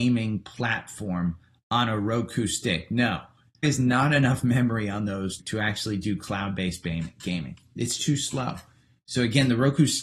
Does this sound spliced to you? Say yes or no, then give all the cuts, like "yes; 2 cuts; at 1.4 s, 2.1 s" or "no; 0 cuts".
yes; 3 cuts; at 3.6 s, 5.4 s, 8.0 s